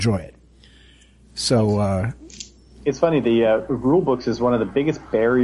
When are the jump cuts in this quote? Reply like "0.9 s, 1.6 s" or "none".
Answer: none